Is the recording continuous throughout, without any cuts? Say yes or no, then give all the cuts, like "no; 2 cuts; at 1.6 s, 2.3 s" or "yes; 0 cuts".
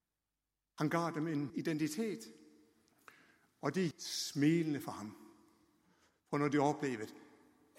no; 2 cuts; at 1.5 s, 3.9 s